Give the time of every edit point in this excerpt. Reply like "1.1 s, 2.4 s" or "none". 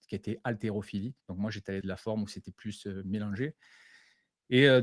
1.2 s, 1.8 s

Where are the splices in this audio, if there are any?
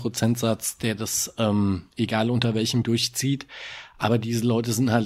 1.9 s, 2.8 s

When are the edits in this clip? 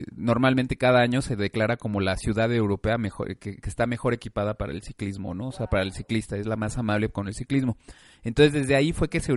none

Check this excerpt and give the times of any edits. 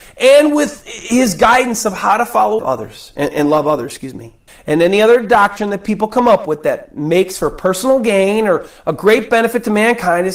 2.6 s, 3.3 s, 4.5 s

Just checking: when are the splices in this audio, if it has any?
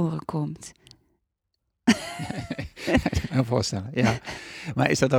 3.3 s

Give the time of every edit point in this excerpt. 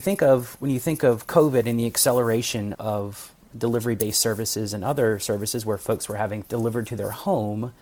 2.7 s, 6.4 s

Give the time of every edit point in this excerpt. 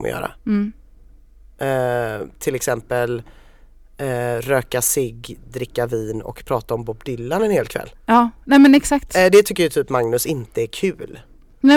none

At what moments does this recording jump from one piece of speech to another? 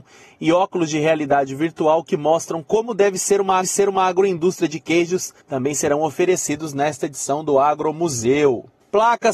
3.6 s, 5.4 s

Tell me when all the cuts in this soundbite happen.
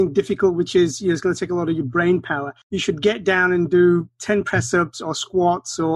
2.6 s

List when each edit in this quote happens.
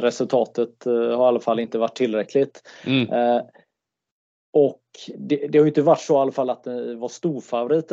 none

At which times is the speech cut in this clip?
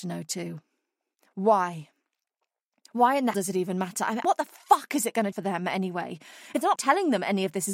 3.3 s, 4.2 s, 5.3 s, 6.8 s

